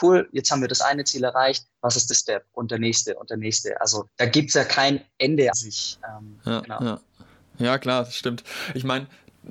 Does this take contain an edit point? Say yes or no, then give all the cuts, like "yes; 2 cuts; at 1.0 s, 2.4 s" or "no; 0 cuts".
yes; 3 cuts; at 2.1 s, 4.1 s, 5.5 s